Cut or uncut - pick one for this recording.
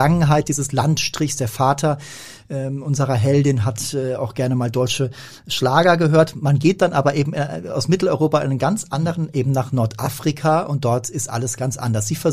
uncut